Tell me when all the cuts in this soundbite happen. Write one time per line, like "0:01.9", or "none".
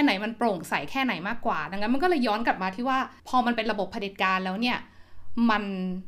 0:03.2